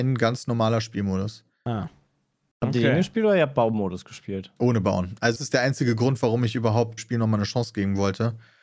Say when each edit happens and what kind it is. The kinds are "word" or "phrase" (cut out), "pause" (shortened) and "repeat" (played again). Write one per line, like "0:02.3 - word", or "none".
0:05.4 - word
0:07.0 - word